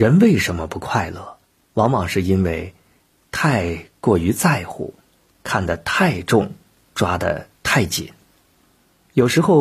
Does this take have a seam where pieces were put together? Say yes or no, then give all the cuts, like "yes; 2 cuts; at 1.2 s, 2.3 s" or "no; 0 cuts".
no; 0 cuts